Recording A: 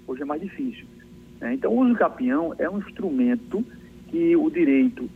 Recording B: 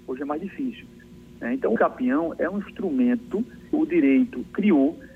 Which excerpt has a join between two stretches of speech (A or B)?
B